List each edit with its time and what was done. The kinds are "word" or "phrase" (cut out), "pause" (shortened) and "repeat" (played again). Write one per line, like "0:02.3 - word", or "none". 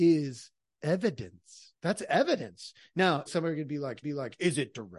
0:01.8 - pause
0:03.3 - word
0:04.0 - repeat